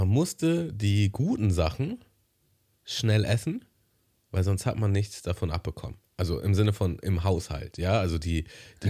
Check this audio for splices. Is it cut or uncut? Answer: uncut